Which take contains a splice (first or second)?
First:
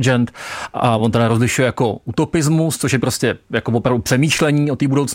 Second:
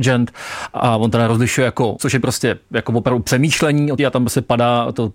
second